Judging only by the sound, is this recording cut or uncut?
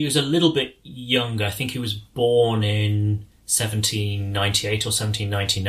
uncut